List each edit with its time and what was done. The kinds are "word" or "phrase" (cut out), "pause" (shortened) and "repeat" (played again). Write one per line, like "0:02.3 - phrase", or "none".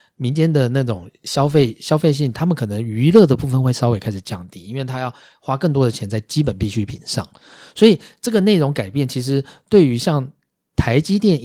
none